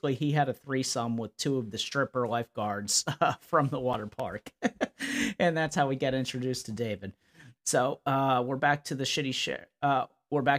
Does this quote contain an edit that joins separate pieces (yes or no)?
no